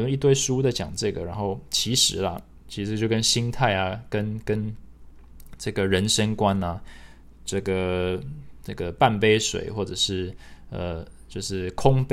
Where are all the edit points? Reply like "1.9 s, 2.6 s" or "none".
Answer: none